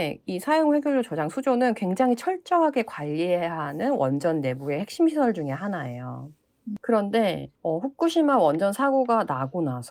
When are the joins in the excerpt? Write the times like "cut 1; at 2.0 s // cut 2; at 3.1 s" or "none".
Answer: cut 1; at 7.5 s

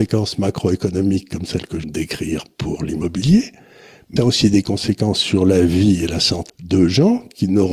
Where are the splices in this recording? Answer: cut 1; at 1.8 s // cut 2; at 4.2 s // cut 3; at 6.5 s

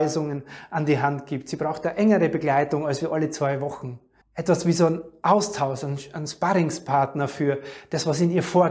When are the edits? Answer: cut 1; at 4.2 s

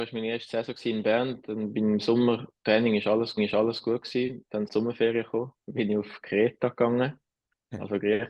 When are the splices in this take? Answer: cut 1; at 2.6 s // cut 2; at 3.4 s // cut 3; at 4.7 s // cut 4; at 5.6 s

